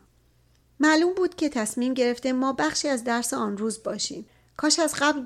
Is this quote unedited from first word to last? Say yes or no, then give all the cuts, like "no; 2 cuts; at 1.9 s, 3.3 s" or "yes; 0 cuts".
yes; 0 cuts